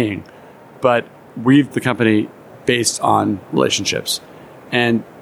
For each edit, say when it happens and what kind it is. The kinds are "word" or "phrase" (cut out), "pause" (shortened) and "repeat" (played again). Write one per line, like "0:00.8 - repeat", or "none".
0:01.7 - word
0:03.4 - pause